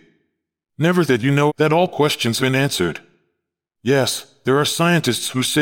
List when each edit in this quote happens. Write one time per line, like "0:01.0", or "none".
0:01.0
0:01.5
0:02.4